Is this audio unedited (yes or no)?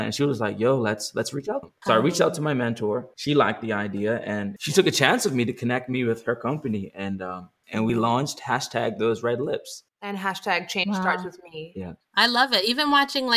no